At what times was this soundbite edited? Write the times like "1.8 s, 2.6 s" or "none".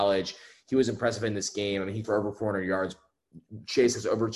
2.0 s

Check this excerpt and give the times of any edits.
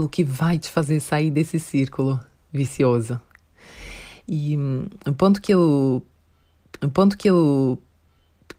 5.0 s, 6.8 s

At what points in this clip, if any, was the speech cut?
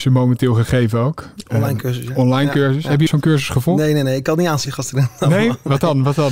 3.1 s, 4.7 s

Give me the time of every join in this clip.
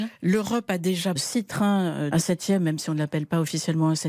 1.2 s, 2.1 s

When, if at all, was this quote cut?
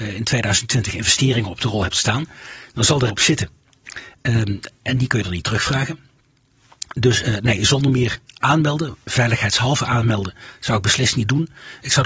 3.1 s

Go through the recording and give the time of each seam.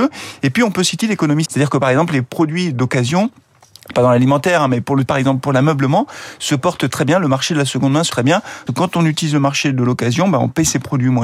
1.0 s, 1.4 s, 3.9 s, 5.1 s, 8.1 s, 8.7 s

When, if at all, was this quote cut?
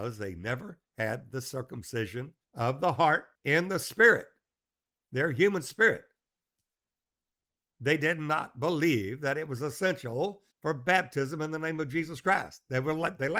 2.4 s, 3.3 s, 10.5 s

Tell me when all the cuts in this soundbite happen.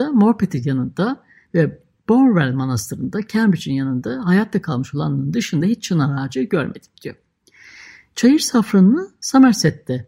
none

